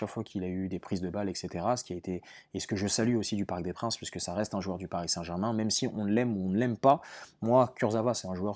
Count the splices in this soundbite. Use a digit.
0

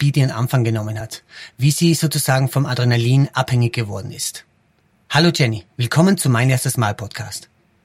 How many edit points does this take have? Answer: 0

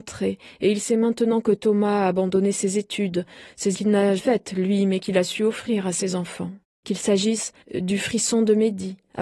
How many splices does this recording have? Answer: 4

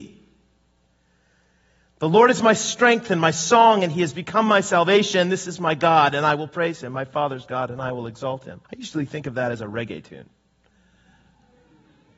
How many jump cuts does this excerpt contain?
1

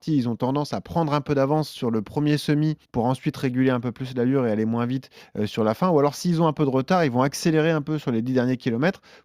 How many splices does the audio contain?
1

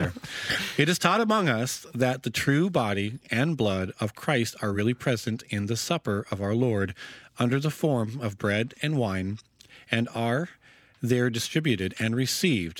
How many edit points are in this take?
0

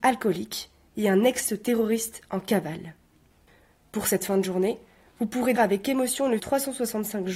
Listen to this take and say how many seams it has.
2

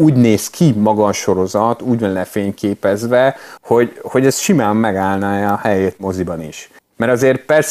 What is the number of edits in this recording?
0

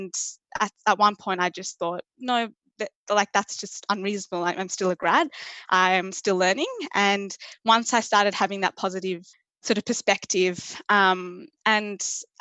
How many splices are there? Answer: 0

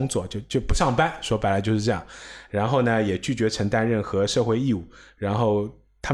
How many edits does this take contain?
0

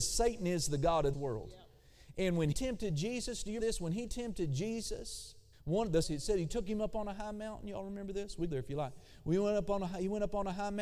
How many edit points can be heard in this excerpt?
6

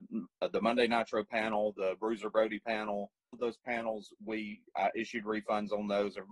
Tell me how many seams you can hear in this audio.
1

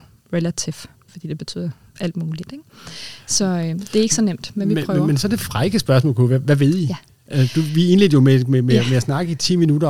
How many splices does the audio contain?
0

